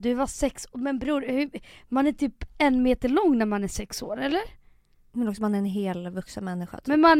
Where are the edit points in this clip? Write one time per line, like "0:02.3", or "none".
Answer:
none